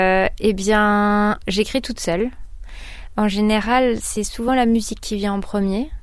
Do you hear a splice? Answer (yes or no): no